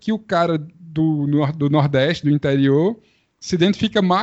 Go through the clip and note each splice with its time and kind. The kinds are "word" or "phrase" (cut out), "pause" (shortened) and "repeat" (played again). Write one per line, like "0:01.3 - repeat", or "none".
none